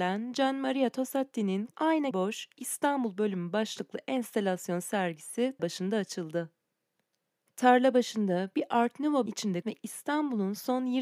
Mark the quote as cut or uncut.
cut